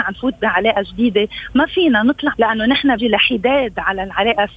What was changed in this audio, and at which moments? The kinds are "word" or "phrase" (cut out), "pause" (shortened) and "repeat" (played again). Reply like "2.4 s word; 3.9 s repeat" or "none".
2.3 s phrase; 3.0 s word